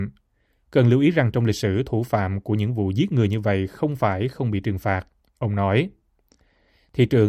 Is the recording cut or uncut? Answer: uncut